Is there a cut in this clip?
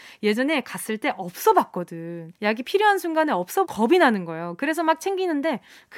yes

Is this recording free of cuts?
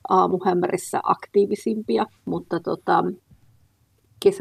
no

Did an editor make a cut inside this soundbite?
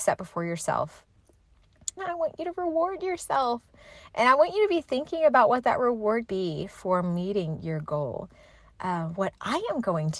yes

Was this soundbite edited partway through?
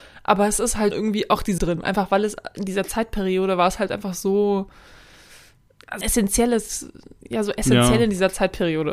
yes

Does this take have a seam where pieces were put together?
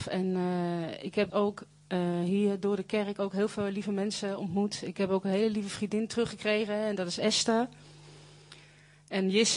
yes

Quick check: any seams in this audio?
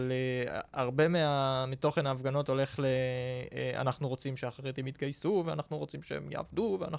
no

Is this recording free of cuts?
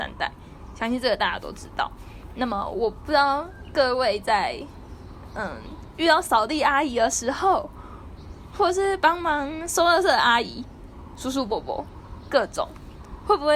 yes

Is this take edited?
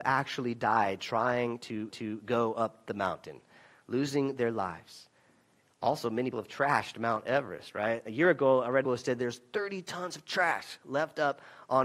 yes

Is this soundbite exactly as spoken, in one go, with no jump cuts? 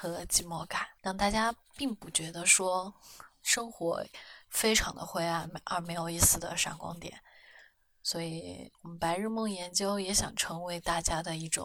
no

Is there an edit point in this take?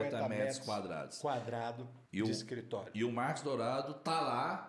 yes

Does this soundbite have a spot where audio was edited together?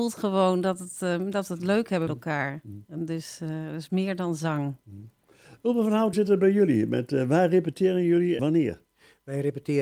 yes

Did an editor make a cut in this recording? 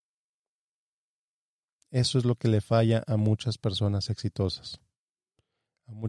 no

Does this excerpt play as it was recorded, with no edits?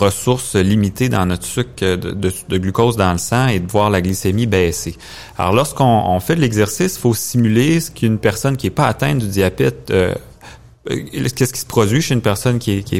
yes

